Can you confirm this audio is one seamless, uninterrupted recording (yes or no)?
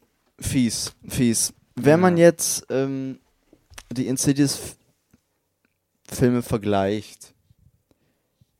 yes